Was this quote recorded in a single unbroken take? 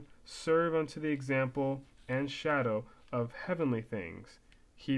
yes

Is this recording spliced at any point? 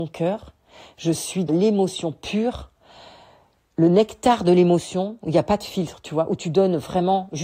yes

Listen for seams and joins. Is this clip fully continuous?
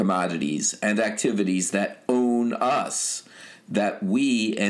yes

